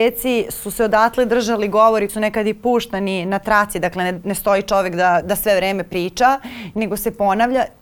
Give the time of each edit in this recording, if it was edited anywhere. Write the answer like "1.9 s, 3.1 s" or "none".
2.1 s, 5.2 s